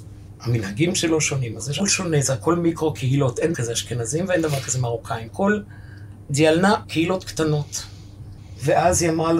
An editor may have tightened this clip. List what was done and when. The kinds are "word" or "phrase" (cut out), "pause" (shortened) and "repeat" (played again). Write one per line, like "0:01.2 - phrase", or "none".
0:01.8 - word
0:03.5 - word
0:05.3 - word
0:06.8 - word